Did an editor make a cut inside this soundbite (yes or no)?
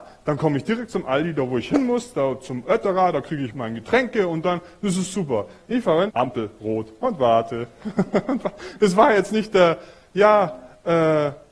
yes